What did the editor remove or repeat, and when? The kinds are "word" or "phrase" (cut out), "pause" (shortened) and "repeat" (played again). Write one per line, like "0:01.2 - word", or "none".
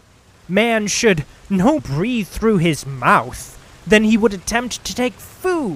0:01.8 - word

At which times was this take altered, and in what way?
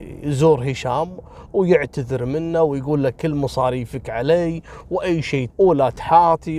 0:05.5 - word

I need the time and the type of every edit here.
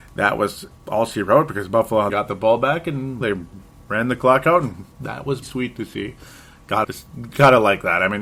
0:02.1 - word
0:03.2 - word
0:05.4 - word
0:06.8 - word

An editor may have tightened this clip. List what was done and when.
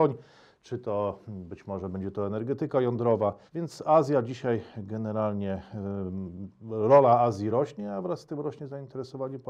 0:03.5 - pause

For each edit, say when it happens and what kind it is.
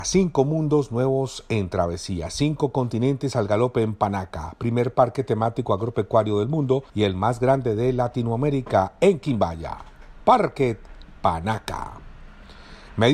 0:06.9 - pause

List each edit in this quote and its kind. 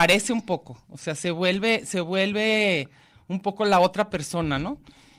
none

